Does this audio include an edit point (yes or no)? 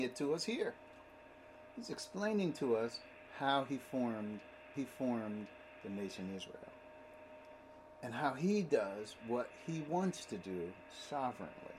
yes